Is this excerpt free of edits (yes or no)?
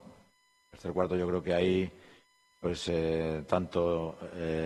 yes